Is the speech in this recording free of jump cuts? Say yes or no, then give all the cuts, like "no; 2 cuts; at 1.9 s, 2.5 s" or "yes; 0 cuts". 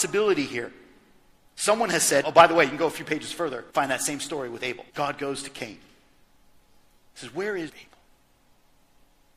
no; 4 cuts; at 2.2 s, 3.7 s, 4.9 s, 7.7 s